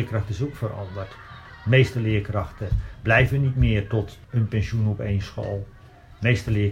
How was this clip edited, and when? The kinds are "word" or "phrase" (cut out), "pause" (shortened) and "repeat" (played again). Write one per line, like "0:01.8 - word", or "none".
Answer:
0:04.2 - pause

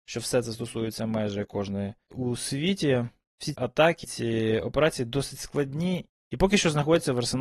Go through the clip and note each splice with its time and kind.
0:02.1 - word
0:03.5 - word
0:04.0 - word

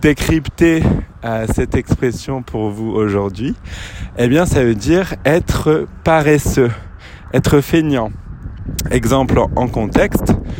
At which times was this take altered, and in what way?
none

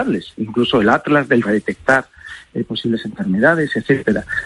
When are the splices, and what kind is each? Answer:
0:01.4 - phrase

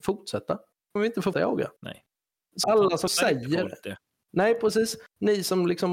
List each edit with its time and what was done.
0:01.0 - word
0:01.3 - word
0:02.6 - word
0:03.1 - word

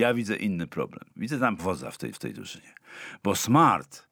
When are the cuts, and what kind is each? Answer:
0:01.1 - pause
0:01.6 - phrase
0:02.1 - repeat

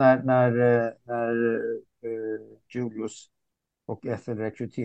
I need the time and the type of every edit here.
none

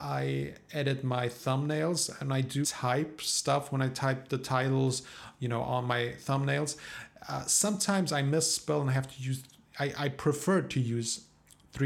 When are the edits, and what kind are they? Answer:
0:02.6 - word

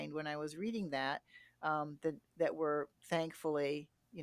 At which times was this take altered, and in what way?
0:03.0 - pause

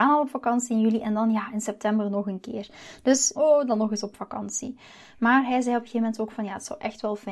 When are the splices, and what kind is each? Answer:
0:03.3 - phrase

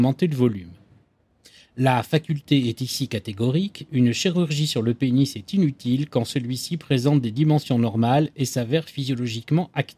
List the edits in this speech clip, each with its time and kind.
none

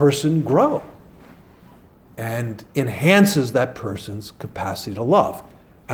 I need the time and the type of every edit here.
none

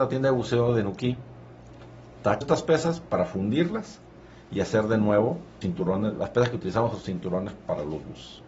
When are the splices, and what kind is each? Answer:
0:02.4 - word
0:05.6 - word
0:06.2 - word

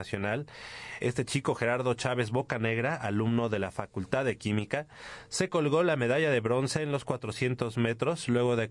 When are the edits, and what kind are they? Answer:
0:01.0 - word

